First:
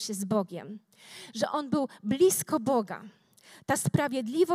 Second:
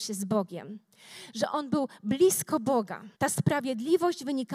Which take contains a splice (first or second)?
second